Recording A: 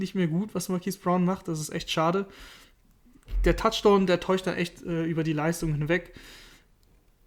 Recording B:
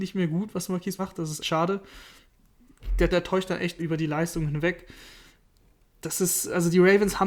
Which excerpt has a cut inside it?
B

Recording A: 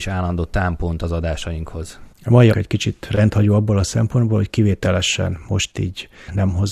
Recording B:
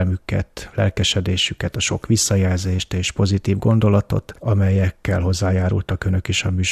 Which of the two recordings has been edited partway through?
A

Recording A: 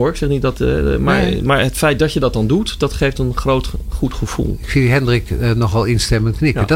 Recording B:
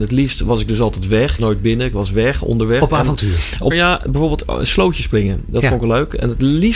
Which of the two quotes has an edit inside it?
B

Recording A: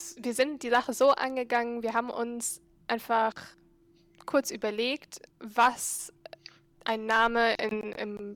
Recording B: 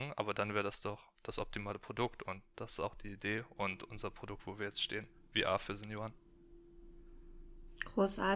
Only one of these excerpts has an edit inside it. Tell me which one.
A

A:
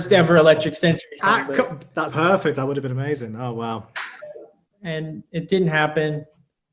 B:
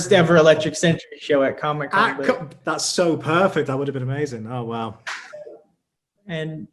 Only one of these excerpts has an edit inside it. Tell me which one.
A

